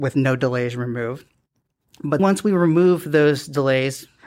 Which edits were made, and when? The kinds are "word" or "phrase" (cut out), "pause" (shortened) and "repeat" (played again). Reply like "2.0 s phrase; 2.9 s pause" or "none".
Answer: 2.2 s word